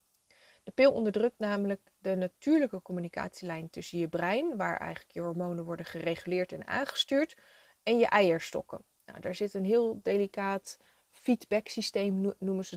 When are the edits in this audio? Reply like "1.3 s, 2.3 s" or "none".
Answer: none